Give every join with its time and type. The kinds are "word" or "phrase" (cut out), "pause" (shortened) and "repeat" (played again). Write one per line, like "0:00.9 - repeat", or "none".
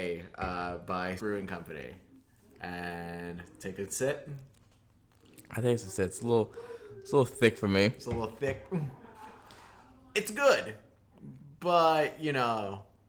0:01.2 - word